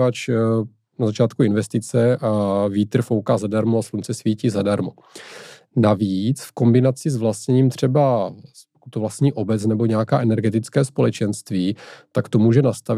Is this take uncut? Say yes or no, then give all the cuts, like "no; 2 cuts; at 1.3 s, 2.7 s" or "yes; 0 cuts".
yes; 0 cuts